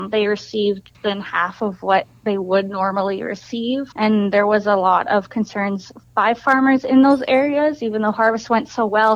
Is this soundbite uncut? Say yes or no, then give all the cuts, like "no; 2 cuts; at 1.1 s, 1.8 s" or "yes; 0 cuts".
no; 2 cuts; at 0.9 s, 3.9 s